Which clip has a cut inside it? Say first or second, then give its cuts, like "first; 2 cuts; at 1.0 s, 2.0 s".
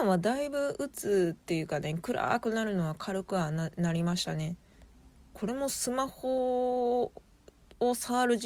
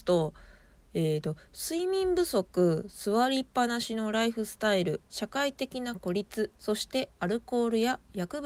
second; 2 cuts; at 5.1 s, 6.6 s